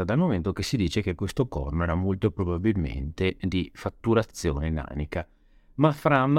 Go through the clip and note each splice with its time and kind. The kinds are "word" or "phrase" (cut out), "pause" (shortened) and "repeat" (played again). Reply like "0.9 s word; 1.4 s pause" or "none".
none

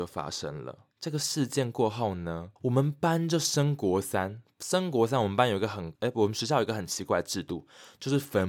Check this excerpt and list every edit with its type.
0.9 s pause; 2.6 s pause; 6.0 s pause

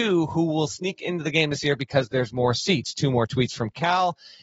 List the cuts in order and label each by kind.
none

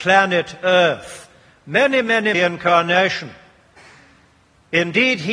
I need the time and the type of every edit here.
2.3 s phrase

